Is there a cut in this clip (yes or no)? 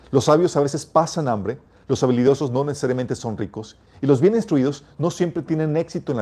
no